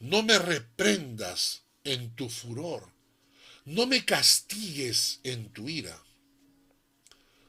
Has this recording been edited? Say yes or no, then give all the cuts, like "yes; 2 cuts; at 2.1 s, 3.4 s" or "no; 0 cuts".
no; 0 cuts